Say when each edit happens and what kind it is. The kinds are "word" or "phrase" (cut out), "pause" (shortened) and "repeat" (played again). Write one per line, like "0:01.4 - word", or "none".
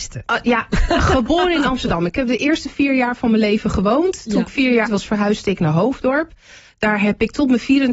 0:04.9 - word